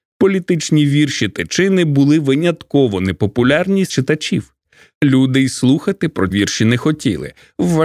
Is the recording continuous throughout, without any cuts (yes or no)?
no